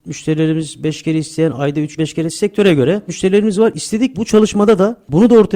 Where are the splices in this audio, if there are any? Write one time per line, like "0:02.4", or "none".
0:02.0
0:03.1
0:04.1